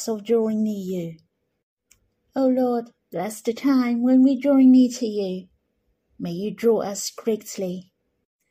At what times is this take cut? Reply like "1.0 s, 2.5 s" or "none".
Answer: 3.0 s

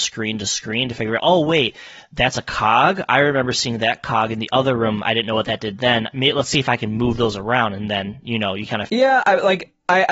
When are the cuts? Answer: 1.2 s, 8.9 s

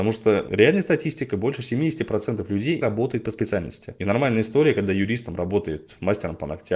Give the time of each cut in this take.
2.8 s

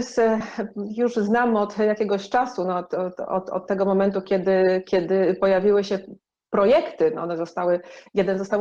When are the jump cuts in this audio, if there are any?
none

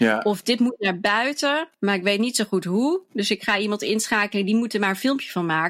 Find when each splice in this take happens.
1.7 s

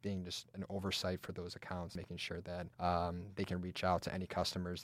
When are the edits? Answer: 2.7 s

